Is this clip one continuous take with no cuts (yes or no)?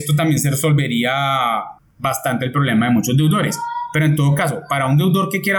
no